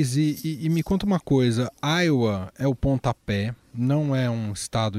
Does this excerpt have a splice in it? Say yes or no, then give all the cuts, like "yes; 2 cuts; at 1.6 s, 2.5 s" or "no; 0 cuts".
no; 0 cuts